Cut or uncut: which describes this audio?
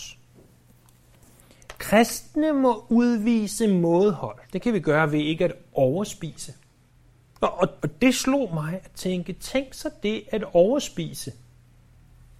cut